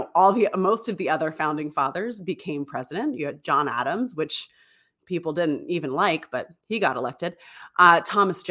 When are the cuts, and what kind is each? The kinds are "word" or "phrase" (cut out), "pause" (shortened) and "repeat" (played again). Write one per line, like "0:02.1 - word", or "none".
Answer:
none